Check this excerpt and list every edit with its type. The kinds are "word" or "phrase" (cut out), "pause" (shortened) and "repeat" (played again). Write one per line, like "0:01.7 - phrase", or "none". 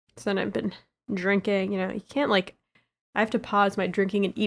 none